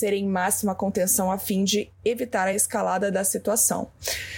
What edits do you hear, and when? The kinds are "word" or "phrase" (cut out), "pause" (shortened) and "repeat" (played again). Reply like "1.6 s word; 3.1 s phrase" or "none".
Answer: none

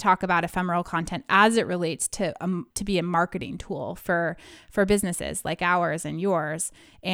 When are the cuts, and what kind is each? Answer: 2.7 s pause

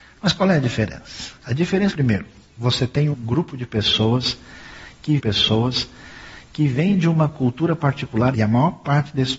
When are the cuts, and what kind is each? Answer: 1.4 s pause; 1.9 s phrase; 3.1 s word; 5.2 s repeat; 8.3 s phrase

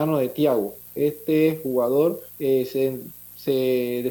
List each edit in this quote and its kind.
2.3 s pause

